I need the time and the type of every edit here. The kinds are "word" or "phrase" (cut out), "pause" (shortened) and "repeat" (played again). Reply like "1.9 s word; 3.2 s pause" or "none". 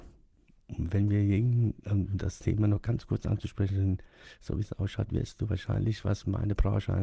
none